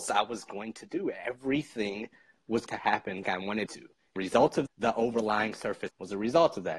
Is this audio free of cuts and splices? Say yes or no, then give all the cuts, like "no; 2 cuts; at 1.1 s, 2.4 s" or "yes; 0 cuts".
no; 6 cuts; at 2.7 s, 3.2 s, 3.7 s, 4.2 s, 4.7 s, 5.9 s